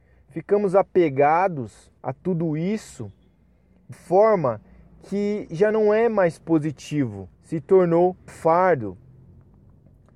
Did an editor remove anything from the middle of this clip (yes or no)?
yes